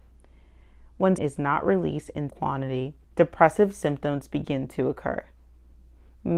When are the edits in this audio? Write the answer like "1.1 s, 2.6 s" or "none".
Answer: 1.2 s, 2.3 s, 3.0 s